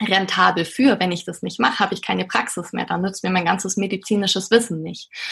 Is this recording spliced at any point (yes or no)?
no